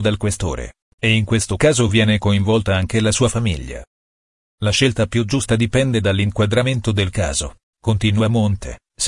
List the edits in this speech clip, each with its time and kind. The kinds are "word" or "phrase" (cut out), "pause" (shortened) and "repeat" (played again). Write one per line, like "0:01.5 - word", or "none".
none